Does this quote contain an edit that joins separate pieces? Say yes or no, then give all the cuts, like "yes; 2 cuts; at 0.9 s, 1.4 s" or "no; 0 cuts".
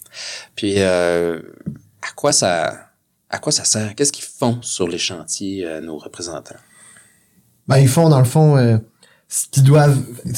no; 0 cuts